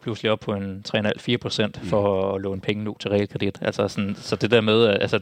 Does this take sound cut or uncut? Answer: uncut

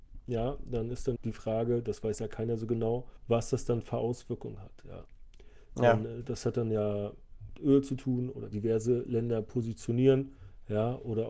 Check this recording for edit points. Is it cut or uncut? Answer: cut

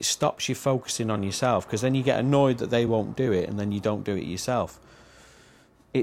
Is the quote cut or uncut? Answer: uncut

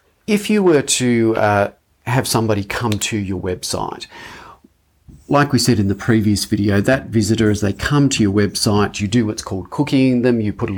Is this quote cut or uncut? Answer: uncut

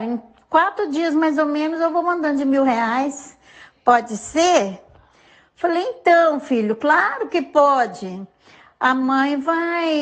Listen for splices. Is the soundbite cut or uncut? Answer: uncut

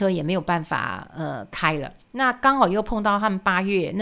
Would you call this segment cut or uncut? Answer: cut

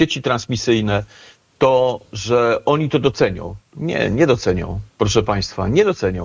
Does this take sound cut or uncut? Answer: uncut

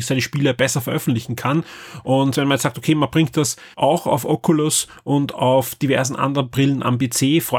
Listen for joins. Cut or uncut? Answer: cut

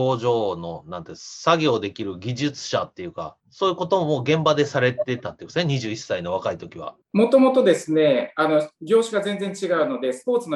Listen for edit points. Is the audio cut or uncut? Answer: cut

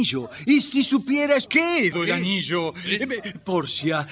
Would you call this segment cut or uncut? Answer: cut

